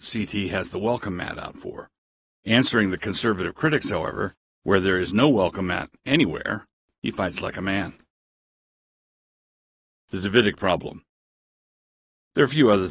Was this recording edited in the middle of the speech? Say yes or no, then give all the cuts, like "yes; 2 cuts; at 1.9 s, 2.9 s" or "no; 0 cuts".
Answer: no; 0 cuts